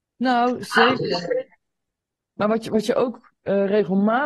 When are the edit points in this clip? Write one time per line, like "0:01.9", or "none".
none

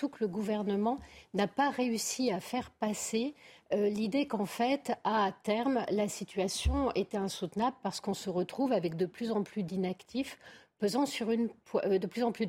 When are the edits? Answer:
none

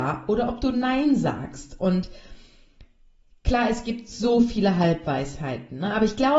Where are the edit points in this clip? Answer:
none

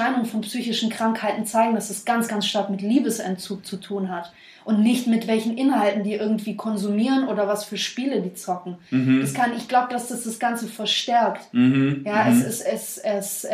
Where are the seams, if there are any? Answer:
none

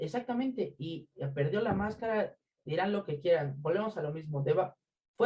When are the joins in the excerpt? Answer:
none

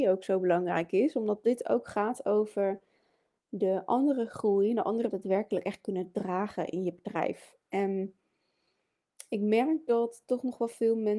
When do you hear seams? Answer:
0:05.1

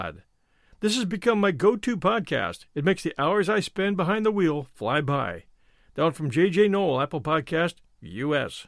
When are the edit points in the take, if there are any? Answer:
none

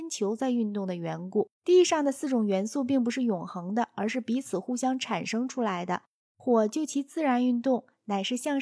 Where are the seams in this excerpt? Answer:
0:01.5

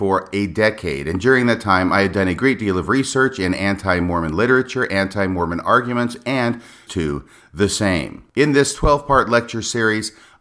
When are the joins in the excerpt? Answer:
0:06.9

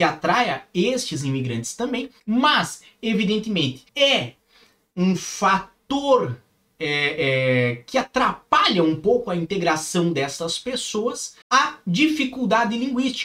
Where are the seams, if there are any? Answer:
0:02.2
0:03.9
0:11.4

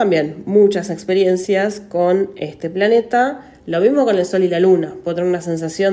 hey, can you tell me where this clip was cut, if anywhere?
none

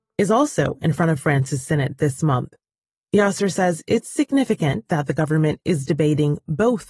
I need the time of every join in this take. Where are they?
none

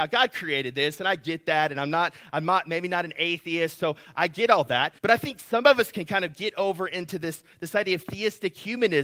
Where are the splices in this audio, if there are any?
0:05.0

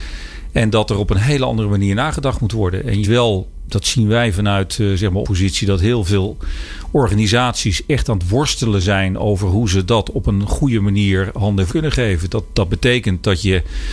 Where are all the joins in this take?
0:03.0
0:05.2
0:11.7

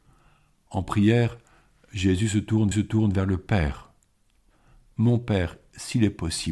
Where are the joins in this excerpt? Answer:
0:02.7

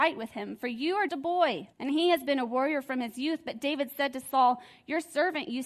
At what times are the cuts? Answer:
0:01.1
0:01.7

